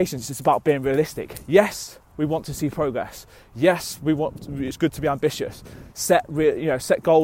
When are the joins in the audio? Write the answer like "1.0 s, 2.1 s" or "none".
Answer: none